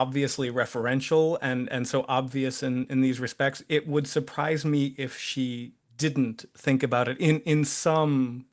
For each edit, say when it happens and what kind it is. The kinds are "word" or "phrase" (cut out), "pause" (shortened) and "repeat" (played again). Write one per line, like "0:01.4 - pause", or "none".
none